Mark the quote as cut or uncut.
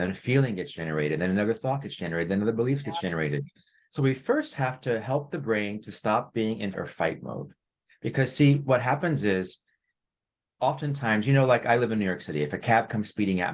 cut